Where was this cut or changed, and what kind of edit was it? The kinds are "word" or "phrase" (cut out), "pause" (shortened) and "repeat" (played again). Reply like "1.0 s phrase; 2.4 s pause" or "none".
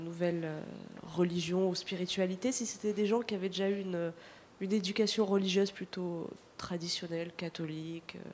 none